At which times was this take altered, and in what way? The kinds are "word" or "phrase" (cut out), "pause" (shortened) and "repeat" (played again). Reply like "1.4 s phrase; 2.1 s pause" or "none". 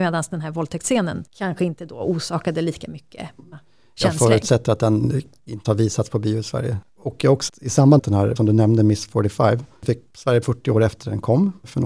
3.5 s word; 5.6 s word; 6.9 s pause; 7.5 s word; 8.0 s word; 8.4 s word; 10.4 s phrase